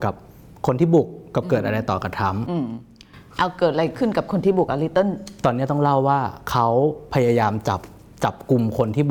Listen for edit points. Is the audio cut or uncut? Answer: uncut